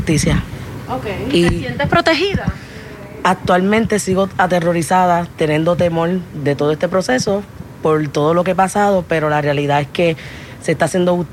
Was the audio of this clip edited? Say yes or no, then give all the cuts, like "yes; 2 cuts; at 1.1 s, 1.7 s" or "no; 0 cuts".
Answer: no; 0 cuts